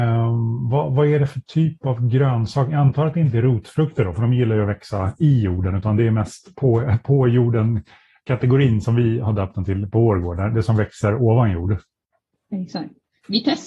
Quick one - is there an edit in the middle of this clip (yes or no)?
no